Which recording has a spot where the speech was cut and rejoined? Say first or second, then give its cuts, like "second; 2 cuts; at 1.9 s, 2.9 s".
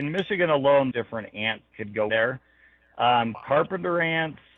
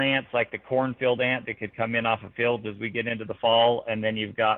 first; 3 cuts; at 0.9 s, 1.7 s, 2.1 s